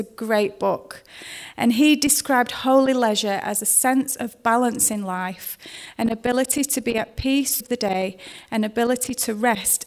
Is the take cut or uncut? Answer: cut